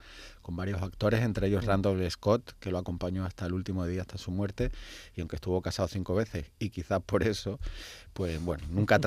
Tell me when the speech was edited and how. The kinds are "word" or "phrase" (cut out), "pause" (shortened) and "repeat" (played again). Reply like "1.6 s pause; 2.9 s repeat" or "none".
none